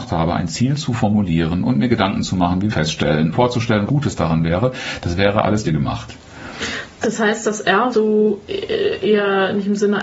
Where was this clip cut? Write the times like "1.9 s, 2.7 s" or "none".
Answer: 2.7 s, 3.3 s, 3.9 s, 5.6 s, 7.9 s